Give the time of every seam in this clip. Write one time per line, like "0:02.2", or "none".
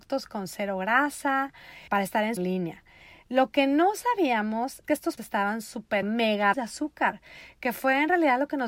0:01.9
0:02.4
0:04.8
0:05.2
0:06.0
0:06.5

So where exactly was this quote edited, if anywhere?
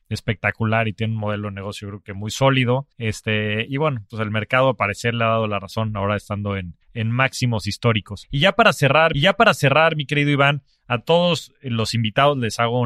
0:02.9
0:06.8
0:09.1

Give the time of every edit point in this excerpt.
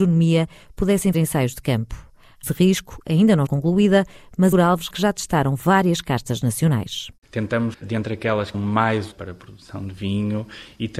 0:01.1
0:02.4
0:03.5
0:04.5
0:04.9
0:07.7
0:08.5
0:09.1

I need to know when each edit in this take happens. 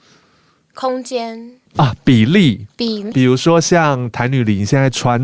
0:01.7
0:03.1

